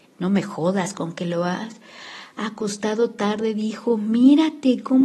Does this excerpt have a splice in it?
no; 0 cuts

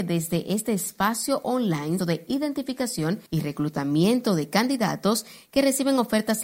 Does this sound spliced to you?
yes; 2 cuts; at 2.0 s, 3.3 s

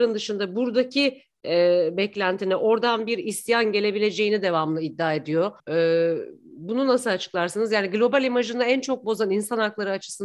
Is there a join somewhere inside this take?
yes; 1 cut; at 5.6 s

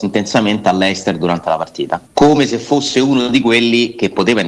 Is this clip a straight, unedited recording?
no; 1 cut; at 2.1 s

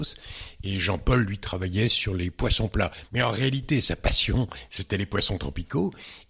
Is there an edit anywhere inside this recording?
no; 0 cuts

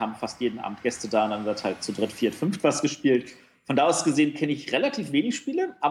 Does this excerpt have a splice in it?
no; 0 cuts

